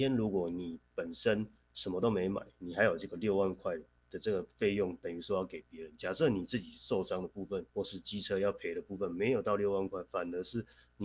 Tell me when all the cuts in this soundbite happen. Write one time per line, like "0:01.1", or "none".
0:07.7